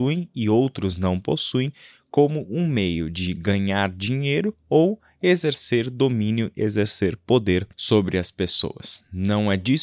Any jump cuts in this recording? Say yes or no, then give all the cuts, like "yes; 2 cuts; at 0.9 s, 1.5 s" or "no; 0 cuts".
yes; 1 cut; at 7.7 s